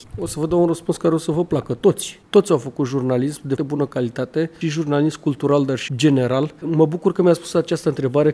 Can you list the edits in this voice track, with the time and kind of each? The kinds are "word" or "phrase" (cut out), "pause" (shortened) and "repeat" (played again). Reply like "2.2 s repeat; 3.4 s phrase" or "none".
3.6 s word; 4.6 s word; 5.9 s word